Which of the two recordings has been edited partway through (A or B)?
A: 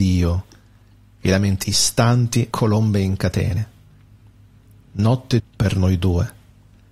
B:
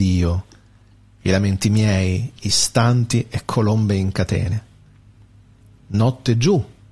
A